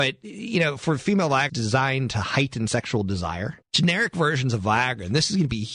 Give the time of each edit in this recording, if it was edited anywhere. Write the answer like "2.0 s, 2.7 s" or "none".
1.5 s, 3.6 s

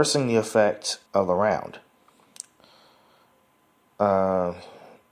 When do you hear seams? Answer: 1.1 s

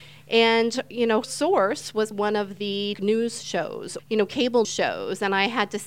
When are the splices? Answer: 1.2 s, 2.1 s, 2.9 s, 4.0 s, 4.6 s

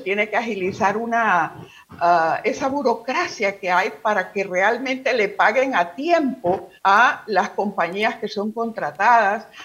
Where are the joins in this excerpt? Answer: 6.8 s

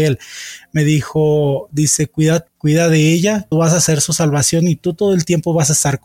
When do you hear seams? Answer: 2.5 s, 3.5 s

